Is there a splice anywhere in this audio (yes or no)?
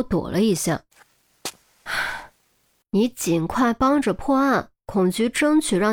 no